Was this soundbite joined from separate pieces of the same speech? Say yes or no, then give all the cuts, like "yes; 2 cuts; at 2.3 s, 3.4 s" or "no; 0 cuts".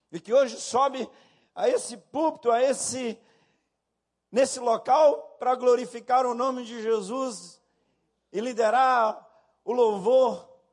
no; 0 cuts